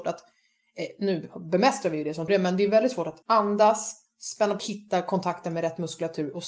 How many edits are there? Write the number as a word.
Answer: three